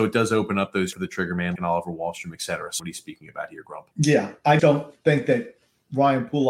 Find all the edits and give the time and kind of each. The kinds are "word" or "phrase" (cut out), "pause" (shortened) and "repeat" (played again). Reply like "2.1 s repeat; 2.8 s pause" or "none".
0.9 s phrase; 1.6 s word; 2.8 s phrase; 3.9 s pause; 4.6 s word